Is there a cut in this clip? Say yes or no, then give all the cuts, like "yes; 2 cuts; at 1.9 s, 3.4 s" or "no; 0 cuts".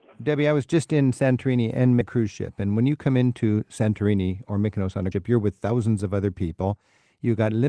yes; 2 cuts; at 2.0 s, 5.1 s